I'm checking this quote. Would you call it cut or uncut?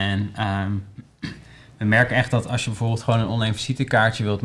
uncut